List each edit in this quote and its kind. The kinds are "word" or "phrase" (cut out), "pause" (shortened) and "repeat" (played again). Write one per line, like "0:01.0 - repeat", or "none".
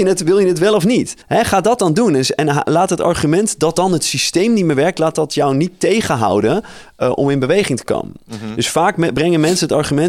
0:01.2 - pause